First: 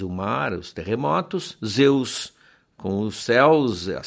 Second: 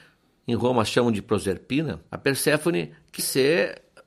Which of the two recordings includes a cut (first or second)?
second